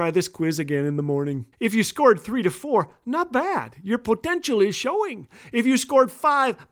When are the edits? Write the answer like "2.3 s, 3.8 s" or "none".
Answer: 1.5 s